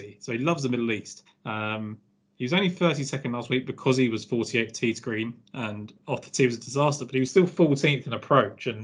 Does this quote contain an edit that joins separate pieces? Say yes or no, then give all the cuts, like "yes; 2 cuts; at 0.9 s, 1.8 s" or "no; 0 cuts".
yes; 2 cuts; at 1.3 s, 6.0 s